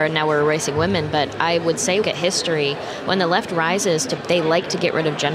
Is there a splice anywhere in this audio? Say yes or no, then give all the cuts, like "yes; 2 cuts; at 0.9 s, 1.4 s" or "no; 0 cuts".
yes; 2 cuts; at 2.0 s, 4.2 s